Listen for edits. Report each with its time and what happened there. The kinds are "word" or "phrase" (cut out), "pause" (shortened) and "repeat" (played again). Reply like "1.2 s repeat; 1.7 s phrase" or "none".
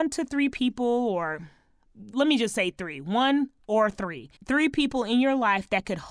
2.1 s word; 4.4 s pause